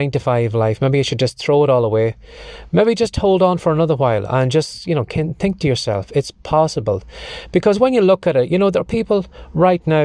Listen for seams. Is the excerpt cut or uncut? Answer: uncut